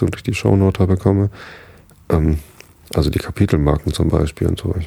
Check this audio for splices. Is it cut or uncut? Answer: uncut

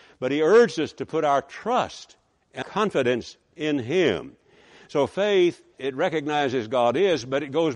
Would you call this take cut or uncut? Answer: cut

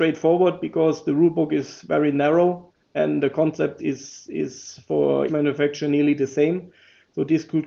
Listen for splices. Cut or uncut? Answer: cut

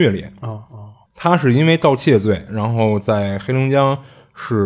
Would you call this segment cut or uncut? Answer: cut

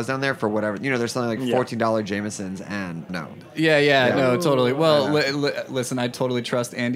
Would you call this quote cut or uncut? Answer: cut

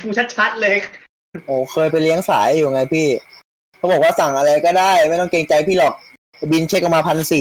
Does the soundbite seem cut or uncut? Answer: uncut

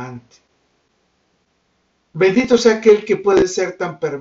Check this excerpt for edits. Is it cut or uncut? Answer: uncut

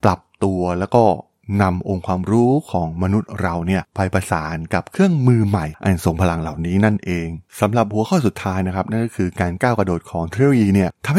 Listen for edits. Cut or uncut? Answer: cut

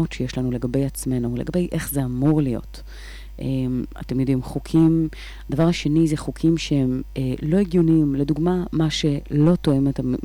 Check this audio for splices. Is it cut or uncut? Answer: uncut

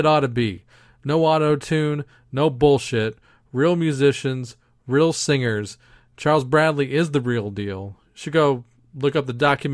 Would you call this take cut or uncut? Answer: uncut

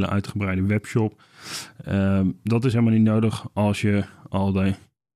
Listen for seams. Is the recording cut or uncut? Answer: uncut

